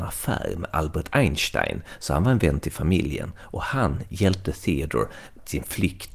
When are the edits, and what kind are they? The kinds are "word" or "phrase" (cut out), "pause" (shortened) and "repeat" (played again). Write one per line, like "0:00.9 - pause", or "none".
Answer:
none